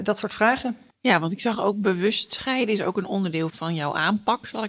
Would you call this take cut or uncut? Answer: cut